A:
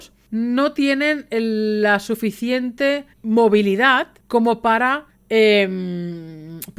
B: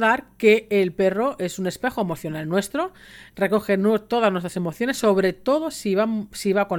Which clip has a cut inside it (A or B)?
A